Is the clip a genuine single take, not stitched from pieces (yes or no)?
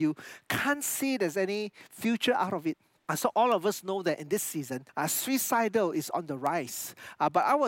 yes